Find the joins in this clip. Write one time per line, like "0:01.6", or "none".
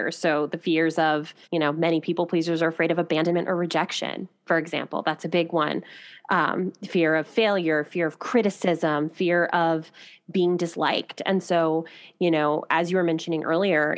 0:01.4